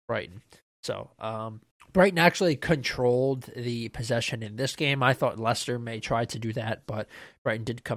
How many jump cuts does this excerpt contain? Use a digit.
1